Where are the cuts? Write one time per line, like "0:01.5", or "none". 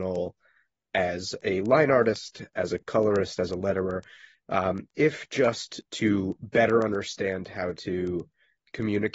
none